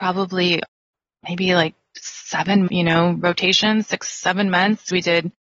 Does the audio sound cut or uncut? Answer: cut